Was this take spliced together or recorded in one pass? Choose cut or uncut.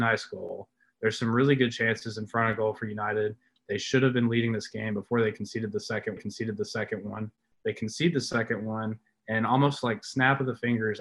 cut